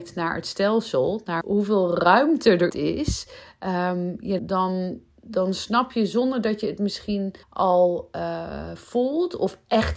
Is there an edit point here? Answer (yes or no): yes